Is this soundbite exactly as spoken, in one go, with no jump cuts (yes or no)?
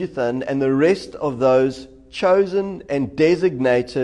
yes